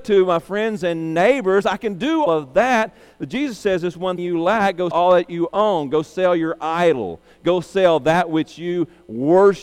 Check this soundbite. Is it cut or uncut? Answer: cut